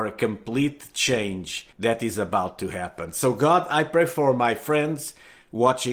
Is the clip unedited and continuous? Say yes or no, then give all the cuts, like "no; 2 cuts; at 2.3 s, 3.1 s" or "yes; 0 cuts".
no; 1 cut; at 1.7 s